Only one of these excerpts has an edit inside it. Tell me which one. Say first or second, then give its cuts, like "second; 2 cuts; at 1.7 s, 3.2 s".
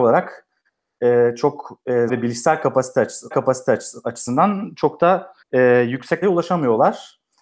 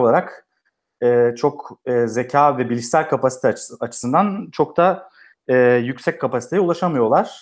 first; 4 cuts; at 2.1 s, 3.3 s, 5.4 s, 6.2 s